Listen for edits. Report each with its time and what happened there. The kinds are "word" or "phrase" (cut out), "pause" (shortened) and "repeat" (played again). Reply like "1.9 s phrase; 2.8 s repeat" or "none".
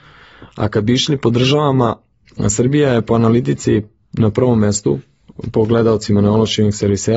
none